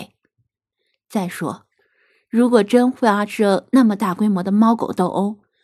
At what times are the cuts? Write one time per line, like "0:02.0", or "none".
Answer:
none